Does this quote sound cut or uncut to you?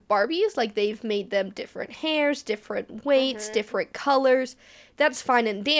uncut